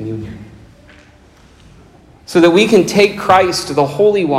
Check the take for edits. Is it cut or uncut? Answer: uncut